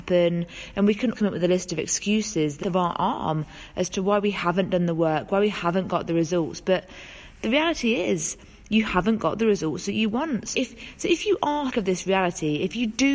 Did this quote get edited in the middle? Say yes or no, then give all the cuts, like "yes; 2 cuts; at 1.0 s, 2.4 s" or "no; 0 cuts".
yes; 4 cuts; at 1.1 s, 2.6 s, 10.5 s, 11.7 s